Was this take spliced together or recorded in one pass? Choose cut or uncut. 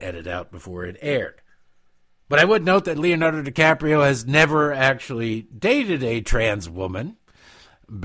uncut